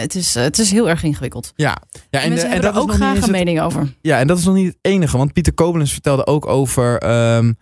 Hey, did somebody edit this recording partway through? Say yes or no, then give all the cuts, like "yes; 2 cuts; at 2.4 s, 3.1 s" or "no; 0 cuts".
no; 0 cuts